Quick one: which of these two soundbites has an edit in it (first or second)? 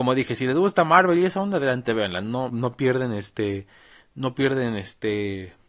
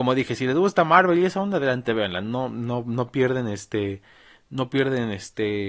first